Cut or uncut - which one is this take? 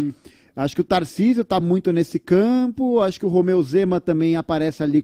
uncut